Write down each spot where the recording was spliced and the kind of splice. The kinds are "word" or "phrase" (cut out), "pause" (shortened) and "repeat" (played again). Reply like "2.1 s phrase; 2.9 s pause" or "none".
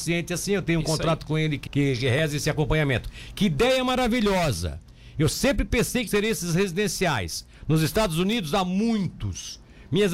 1.7 s word; 6.1 s word